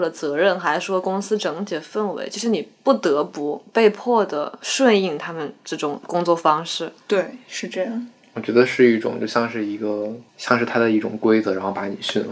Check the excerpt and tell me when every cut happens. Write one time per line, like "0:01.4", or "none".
0:10.3